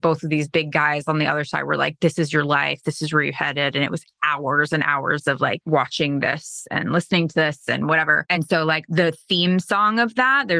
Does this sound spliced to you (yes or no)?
no